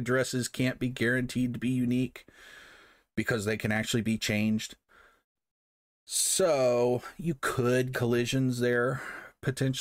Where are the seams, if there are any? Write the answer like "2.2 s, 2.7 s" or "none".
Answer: 7.9 s